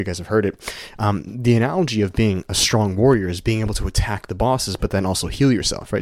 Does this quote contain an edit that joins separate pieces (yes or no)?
no